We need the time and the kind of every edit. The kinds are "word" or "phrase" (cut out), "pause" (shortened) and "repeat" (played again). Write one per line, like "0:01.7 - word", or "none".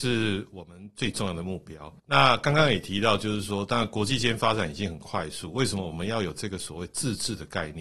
0:02.0 - pause